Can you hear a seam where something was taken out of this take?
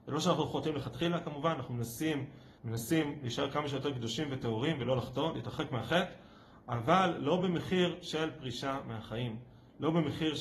yes; 1 cut; at 2.6 s

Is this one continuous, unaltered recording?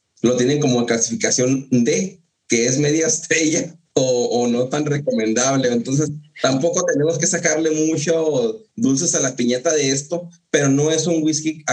no; 1 cut; at 8.7 s

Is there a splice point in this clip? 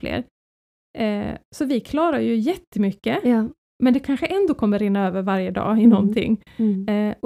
no; 0 cuts

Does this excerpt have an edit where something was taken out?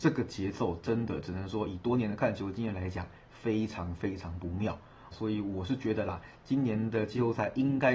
yes; 1 cut; at 5.1 s

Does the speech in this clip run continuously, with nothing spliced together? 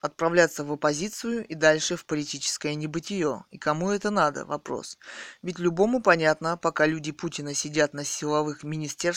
yes; 0 cuts

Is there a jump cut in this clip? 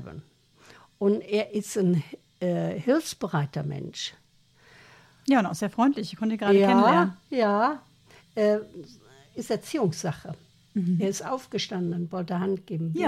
no; 0 cuts

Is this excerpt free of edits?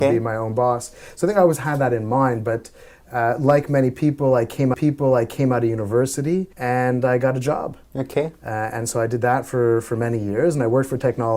no; 2 cuts; at 4.7 s, 6.5 s

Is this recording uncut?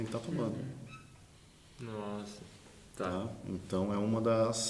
yes; 0 cuts

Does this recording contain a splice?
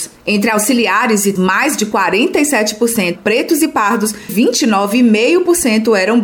yes; 3 cuts; at 1.4 s, 3.2 s, 4.3 s

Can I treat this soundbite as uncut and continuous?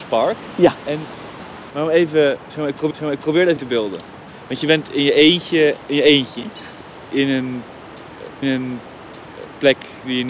no; 4 cuts; at 1.7 s, 2.9 s, 3.6 s, 8.4 s

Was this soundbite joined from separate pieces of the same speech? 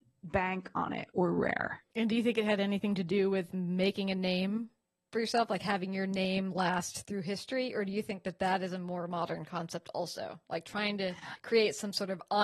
no; 0 cuts

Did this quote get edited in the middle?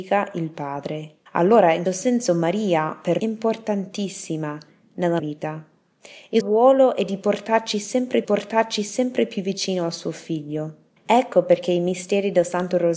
yes; 7 cuts; at 1.3 s, 1.9 s, 3.2 s, 5.2 s, 6.4 s, 8.2 s, 11.0 s

